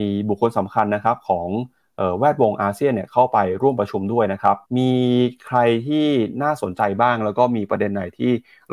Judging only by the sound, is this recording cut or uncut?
cut